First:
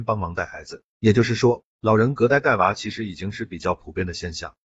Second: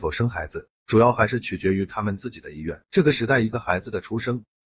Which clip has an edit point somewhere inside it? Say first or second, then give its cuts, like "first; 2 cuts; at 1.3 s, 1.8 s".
second; 1 cut; at 2.8 s